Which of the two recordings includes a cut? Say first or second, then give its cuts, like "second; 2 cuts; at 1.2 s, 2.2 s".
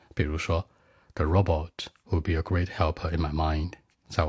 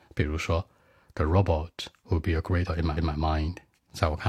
second; 2 cuts; at 2.7 s, 3.0 s